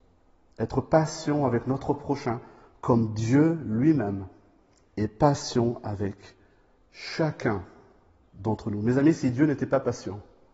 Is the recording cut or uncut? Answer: uncut